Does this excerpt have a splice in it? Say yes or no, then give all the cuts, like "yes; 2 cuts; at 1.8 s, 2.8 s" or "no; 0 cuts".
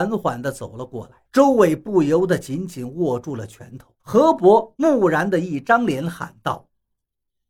yes; 2 cuts; at 1.2 s, 4.0 s